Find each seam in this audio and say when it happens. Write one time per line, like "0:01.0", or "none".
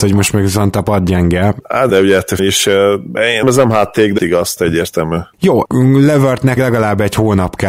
0:01.9
0:02.4
0:03.4
0:04.2
0:04.6
0:06.6

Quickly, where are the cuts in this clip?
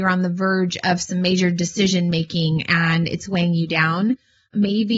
none

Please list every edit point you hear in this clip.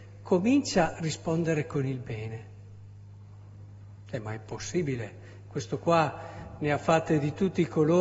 0:00.9

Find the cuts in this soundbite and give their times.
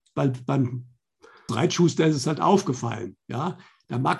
0:01.5

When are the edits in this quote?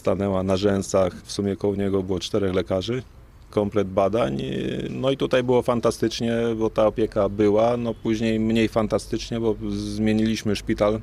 none

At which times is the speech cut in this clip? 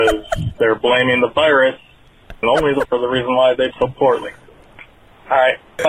0:02.4
0:02.8
0:03.7

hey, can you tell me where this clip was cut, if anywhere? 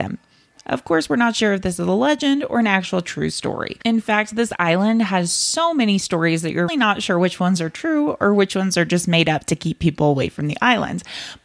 0:06.7

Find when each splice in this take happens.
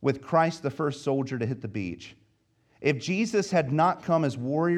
none

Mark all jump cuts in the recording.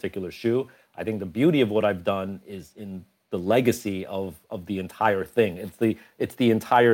0:04.4

